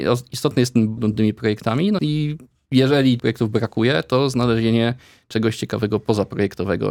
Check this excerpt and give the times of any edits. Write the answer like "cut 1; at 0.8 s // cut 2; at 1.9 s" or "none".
cut 1; at 1.0 s // cut 2; at 2.0 s // cut 3; at 3.2 s